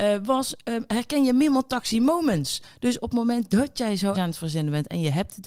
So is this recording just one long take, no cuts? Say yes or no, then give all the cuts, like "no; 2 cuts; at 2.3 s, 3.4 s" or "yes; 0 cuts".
no; 1 cut; at 4.1 s